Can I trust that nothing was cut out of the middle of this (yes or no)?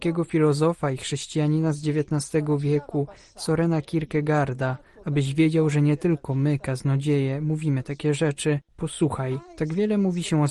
yes